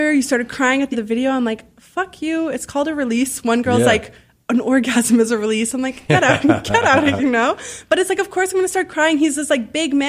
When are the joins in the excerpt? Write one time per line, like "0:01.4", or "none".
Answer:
0:00.9
0:07.2